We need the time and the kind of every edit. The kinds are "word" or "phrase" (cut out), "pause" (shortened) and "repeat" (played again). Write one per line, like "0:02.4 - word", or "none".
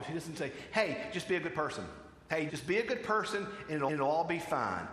0:02.5 - word
0:03.9 - repeat